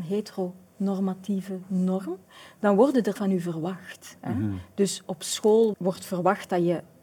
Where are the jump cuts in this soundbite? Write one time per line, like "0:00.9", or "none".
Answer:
0:03.2
0:05.7